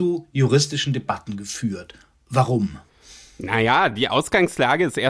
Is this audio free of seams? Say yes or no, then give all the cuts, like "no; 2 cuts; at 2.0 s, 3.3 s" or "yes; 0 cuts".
yes; 0 cuts